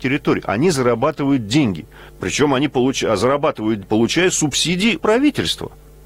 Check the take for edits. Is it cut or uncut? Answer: cut